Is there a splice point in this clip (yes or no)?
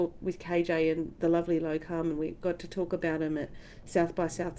no